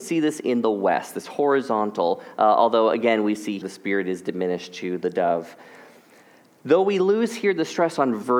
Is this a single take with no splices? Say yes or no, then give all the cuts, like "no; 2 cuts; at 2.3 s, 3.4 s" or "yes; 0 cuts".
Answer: no; 1 cut; at 3.6 s